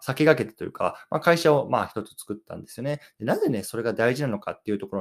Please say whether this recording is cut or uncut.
uncut